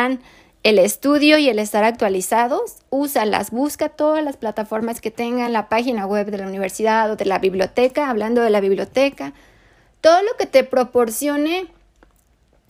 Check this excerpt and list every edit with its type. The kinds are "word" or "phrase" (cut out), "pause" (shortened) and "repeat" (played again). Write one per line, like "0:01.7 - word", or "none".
none